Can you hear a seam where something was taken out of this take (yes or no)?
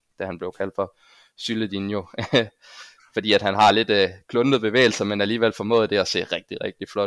no